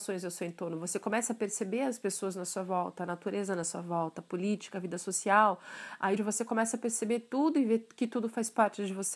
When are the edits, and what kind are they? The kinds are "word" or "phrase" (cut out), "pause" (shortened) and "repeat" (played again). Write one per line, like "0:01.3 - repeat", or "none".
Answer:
0:06.2 - phrase

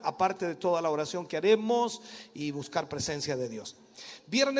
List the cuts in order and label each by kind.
none

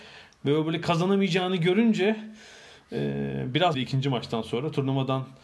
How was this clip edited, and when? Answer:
0:03.7 - phrase

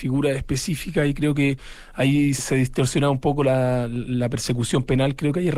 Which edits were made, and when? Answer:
0:02.4 - word

